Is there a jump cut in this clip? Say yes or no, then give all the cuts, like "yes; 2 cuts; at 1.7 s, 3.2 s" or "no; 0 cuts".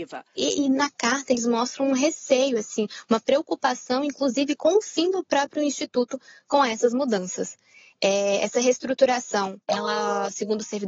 yes; 1 cut; at 9.6 s